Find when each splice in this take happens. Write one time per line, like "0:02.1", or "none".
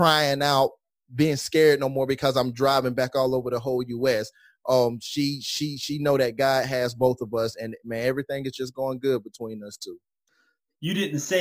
none